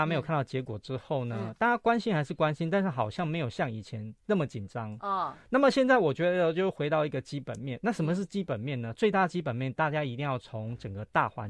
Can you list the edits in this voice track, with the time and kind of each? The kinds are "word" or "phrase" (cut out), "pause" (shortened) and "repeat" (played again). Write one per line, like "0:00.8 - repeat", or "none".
0:04.2 - pause